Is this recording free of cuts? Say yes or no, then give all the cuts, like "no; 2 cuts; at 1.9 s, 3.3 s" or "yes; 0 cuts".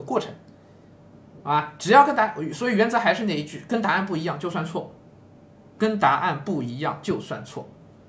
yes; 0 cuts